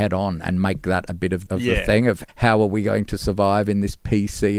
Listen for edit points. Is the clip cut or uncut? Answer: cut